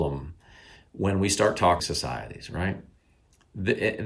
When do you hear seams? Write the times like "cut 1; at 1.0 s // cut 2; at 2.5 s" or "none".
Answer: cut 1; at 1.8 s